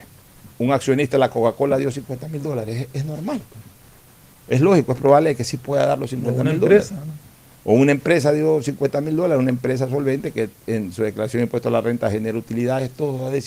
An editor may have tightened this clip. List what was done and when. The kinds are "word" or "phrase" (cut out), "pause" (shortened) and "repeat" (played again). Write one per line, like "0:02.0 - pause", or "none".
none